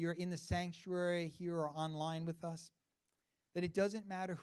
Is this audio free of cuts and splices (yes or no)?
yes